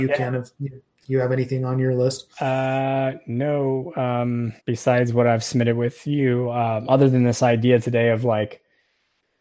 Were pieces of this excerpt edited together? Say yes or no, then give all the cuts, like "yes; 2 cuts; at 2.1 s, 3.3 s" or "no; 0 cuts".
yes; 2 cuts; at 2.3 s, 4.6 s